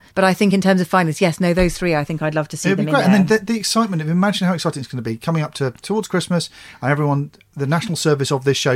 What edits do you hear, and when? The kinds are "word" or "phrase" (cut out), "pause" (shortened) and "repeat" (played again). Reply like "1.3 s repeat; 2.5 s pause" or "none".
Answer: none